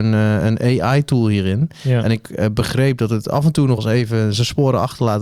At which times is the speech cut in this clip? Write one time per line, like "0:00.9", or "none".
0:03.8